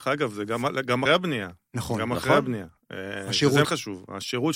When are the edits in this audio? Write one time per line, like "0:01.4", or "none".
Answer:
0:01.1
0:03.6